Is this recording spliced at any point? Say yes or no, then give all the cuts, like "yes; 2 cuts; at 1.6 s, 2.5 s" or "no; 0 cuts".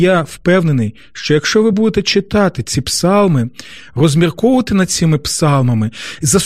no; 0 cuts